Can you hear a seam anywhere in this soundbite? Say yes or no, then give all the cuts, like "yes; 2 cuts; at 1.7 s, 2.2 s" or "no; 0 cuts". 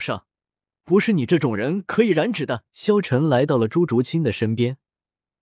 yes; 1 cut; at 2.7 s